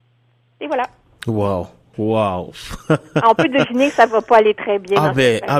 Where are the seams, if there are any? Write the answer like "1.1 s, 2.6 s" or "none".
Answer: none